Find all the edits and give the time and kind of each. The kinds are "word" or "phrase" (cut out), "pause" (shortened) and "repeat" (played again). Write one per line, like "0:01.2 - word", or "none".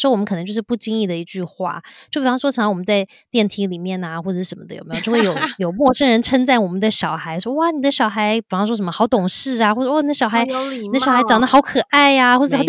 none